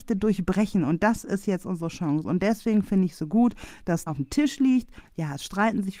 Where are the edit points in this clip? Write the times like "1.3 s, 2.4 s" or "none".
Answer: 4.1 s